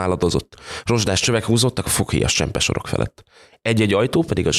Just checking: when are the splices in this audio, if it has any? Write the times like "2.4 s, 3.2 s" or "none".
none